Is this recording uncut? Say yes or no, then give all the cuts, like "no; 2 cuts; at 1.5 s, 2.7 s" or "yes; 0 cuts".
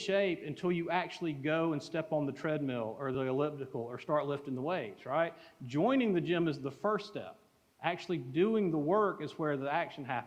yes; 0 cuts